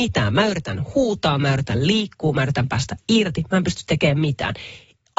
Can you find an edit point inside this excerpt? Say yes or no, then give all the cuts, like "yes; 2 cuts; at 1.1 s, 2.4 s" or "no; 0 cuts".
no; 0 cuts